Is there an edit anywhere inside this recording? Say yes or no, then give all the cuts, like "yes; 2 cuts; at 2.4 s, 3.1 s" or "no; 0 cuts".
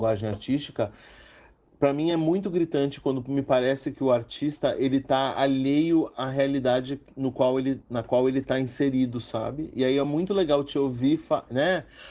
no; 0 cuts